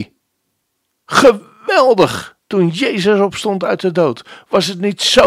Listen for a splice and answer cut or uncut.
cut